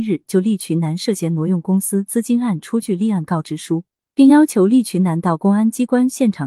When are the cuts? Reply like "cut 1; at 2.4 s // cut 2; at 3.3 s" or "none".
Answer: none